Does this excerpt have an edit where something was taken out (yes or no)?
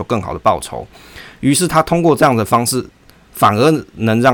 no